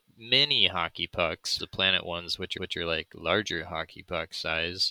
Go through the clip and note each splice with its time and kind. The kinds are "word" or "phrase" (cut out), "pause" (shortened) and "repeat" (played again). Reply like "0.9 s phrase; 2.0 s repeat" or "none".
1.6 s word; 2.6 s repeat